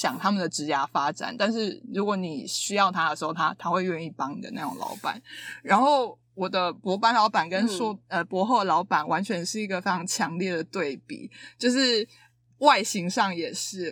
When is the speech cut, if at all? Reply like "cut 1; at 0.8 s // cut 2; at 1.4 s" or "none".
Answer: none